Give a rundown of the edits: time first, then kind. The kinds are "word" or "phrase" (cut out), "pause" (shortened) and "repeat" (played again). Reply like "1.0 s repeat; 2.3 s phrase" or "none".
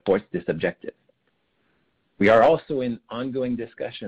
none